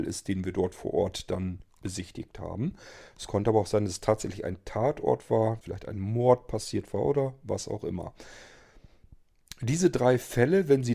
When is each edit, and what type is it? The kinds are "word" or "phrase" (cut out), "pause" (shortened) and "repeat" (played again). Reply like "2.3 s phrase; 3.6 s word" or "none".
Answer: 5.6 s word